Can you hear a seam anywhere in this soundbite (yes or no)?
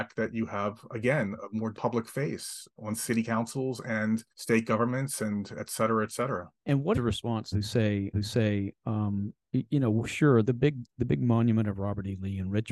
yes